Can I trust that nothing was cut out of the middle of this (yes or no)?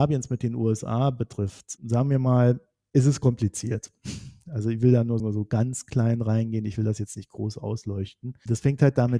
no